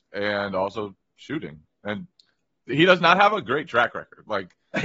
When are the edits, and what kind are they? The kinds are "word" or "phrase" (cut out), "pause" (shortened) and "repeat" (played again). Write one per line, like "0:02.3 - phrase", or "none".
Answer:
none